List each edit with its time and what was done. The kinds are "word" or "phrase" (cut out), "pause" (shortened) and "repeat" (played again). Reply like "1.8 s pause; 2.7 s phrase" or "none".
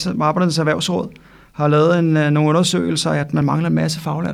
none

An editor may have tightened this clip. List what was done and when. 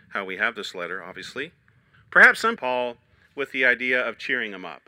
1.9 s pause; 2.6 s phrase

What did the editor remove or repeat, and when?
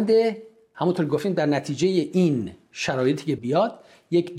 3.4 s word

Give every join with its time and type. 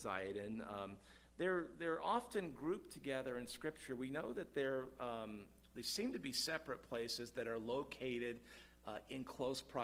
none

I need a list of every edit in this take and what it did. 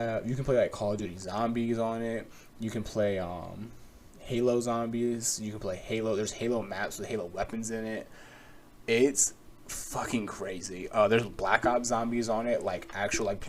4.1 s pause

